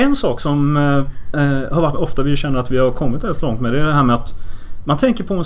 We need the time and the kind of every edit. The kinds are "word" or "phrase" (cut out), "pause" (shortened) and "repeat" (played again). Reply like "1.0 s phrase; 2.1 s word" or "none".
1.9 s phrase